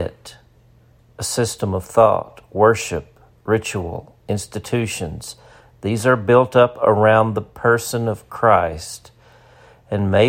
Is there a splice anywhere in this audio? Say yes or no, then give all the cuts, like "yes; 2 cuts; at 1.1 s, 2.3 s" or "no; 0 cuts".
no; 0 cuts